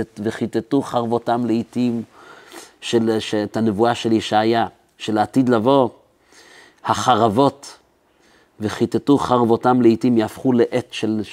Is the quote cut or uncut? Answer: uncut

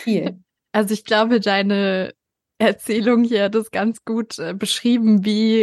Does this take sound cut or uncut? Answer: uncut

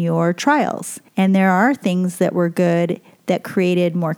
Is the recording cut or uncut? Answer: cut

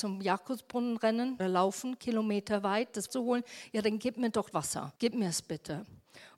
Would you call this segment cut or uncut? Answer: cut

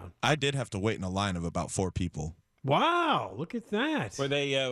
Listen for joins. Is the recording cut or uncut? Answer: uncut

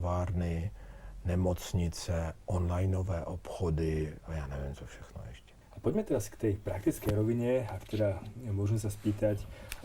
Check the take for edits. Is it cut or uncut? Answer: uncut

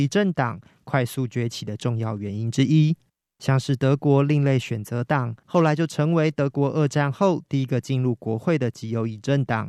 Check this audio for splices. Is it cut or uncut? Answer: uncut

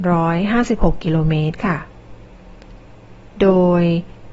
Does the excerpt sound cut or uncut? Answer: uncut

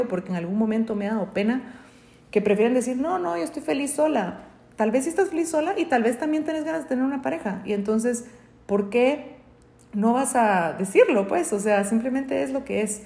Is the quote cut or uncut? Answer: uncut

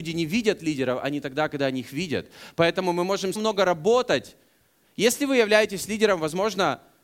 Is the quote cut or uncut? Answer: cut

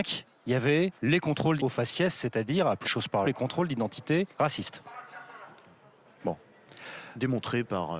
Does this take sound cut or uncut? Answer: cut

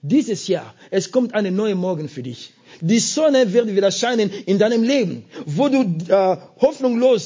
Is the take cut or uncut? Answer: uncut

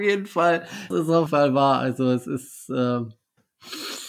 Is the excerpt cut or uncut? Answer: cut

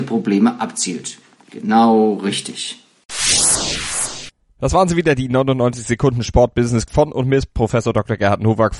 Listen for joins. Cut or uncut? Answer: cut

